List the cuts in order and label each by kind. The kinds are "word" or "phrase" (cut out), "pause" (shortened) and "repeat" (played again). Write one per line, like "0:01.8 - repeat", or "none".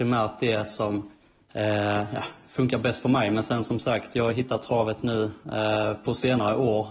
0:01.2 - pause
0:05.4 - pause